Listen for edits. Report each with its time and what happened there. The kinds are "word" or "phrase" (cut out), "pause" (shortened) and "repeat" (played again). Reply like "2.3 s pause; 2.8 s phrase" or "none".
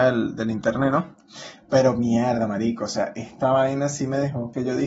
none